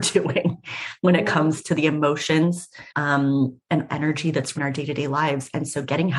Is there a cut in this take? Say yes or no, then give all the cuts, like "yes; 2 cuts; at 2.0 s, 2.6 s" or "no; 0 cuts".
yes; 3 cuts; at 2.9 s, 3.9 s, 4.6 s